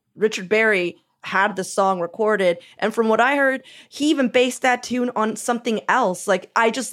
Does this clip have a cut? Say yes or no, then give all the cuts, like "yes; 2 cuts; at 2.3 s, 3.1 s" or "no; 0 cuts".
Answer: no; 0 cuts